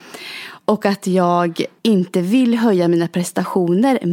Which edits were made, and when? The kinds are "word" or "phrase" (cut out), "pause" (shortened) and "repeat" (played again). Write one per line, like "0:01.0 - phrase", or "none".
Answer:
0:01.8 - pause